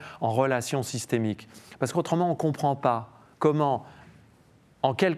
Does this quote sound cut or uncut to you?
cut